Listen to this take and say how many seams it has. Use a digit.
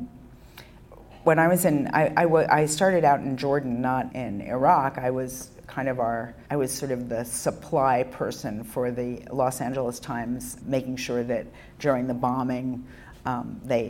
2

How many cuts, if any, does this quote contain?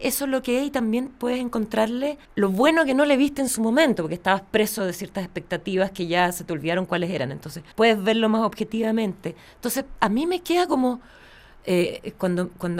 3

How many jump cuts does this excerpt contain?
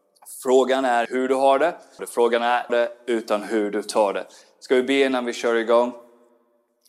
3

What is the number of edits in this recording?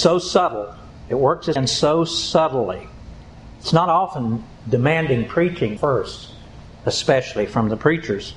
2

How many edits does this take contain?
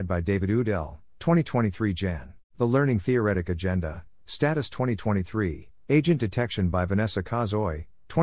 1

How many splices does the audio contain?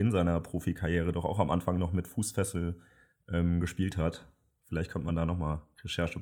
0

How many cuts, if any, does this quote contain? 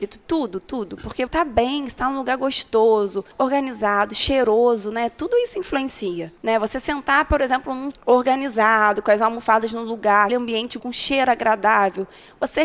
6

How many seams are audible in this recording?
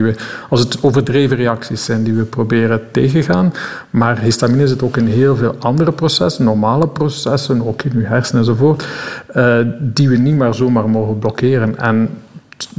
0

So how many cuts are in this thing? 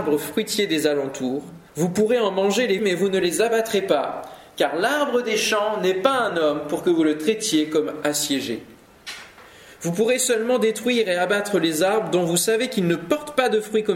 2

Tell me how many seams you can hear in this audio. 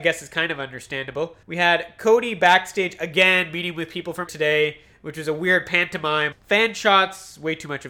3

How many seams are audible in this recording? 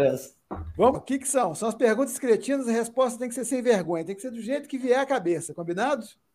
1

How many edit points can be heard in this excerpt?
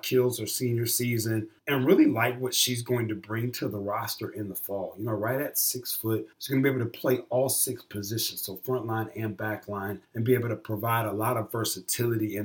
3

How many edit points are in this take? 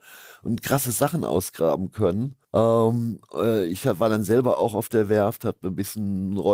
1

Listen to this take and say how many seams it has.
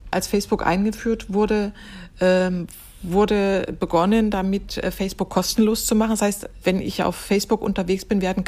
0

